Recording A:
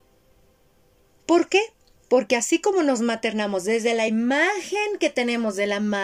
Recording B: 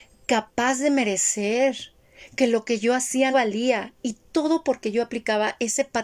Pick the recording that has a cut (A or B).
B